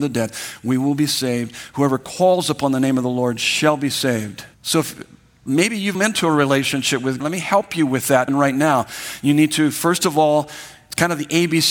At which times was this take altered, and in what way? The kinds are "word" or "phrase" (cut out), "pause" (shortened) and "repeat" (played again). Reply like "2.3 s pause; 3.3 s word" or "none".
4.5 s pause; 5.9 s phrase; 7.2 s word; 8.3 s word